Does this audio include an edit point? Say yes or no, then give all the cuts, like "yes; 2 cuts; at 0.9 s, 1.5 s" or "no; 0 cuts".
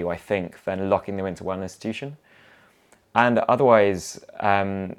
no; 0 cuts